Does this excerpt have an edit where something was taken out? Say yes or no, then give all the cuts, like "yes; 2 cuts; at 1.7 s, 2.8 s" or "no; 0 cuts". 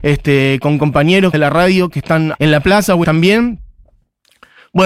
yes; 3 cuts; at 1.3 s, 2.3 s, 3.0 s